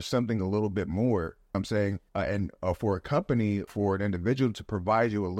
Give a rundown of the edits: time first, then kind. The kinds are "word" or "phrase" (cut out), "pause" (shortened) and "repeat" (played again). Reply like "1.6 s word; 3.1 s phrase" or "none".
1.5 s phrase; 2.1 s pause; 3.7 s word